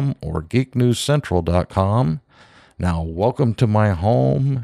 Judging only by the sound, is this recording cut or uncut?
uncut